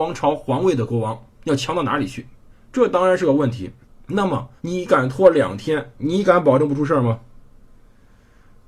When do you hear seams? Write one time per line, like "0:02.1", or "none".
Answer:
0:01.3
0:02.5
0:03.8
0:04.6